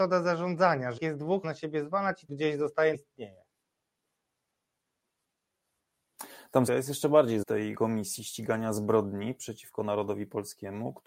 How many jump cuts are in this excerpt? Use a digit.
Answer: 7